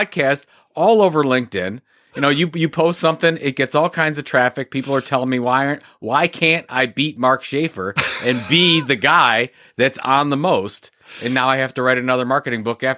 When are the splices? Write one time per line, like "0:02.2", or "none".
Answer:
none